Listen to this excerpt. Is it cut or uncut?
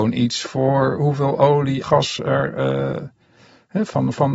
cut